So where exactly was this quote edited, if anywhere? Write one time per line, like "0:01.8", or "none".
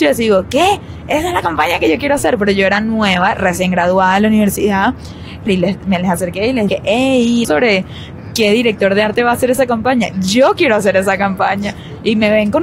0:05.5
0:06.7
0:07.4

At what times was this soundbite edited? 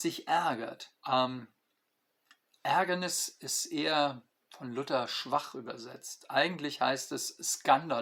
0:01.0
0:04.3

